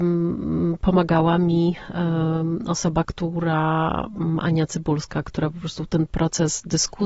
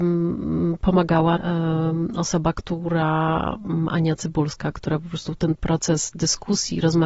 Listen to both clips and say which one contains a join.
second; 1 cut; at 1.4 s

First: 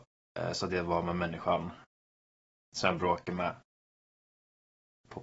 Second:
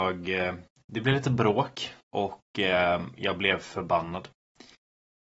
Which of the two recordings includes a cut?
second; 1 cut; at 2.0 s

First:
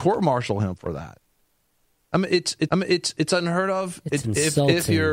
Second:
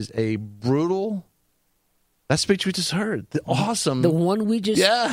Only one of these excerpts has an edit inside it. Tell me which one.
first; 1 cut; at 2.7 s

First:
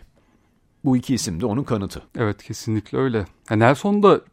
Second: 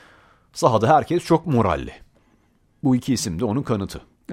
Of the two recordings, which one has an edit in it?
first; 1 cut; at 2.1 s

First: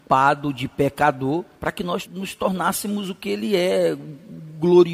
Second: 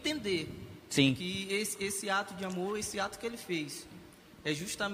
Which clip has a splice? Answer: first; 2 cuts; at 1.6 s, 2.1 s

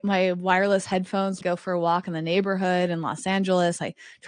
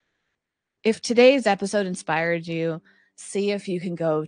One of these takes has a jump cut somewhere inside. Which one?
first; 1 cut; at 1.4 s

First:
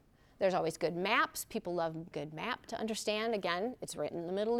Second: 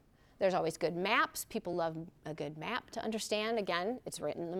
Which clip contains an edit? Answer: first; 1 cut; at 2.1 s

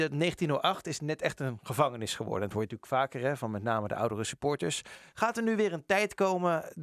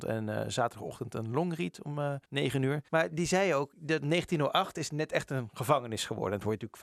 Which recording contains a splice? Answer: second; 2 cuts; at 2.2 s, 2.9 s

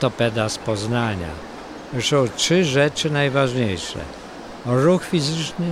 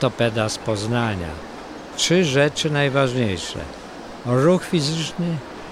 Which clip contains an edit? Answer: second; 1 cut; at 1.9 s

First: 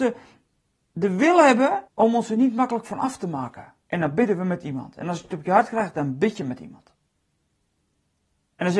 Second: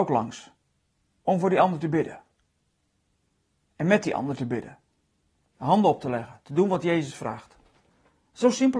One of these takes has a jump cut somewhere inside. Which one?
first; 2 cuts; at 1.9 s, 3.8 s

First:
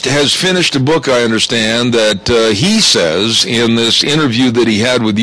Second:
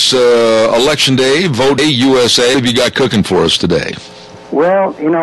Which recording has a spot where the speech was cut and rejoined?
second; 2 cuts; at 1.8 s, 2.5 s

